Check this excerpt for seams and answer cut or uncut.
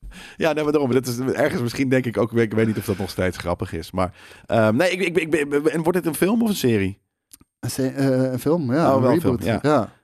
uncut